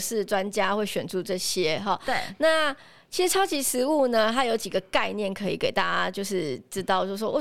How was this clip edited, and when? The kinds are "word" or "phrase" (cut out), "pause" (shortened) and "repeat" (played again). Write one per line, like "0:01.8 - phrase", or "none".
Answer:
none